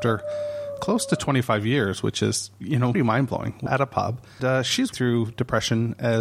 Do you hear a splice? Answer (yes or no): yes